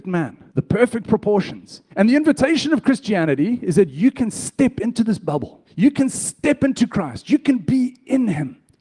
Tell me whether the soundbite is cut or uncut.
cut